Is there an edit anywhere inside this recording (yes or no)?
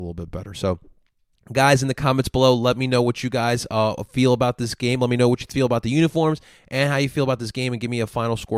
no